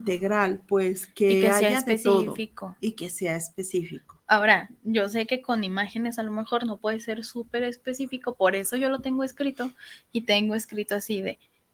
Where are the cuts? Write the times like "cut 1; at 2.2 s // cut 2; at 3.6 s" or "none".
cut 1; at 4.2 s